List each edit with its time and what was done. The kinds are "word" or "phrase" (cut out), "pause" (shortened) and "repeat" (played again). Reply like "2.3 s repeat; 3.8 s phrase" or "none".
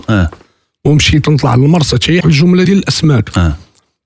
1.2 s word; 2.2 s phrase; 2.7 s word